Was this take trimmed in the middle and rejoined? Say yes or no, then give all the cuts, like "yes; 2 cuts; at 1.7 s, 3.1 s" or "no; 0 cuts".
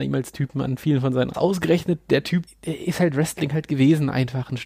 yes; 2 cuts; at 1.3 s, 2.5 s